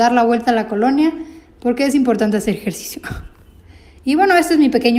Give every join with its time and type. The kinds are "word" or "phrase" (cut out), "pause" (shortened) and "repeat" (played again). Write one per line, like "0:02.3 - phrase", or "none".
none

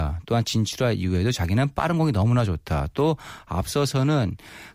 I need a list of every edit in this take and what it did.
none

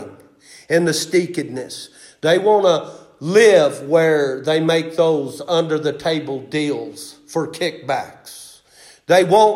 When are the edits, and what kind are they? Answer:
none

